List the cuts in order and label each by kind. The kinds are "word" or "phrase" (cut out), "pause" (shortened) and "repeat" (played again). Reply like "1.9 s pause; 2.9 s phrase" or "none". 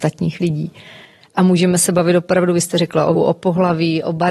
3.2 s word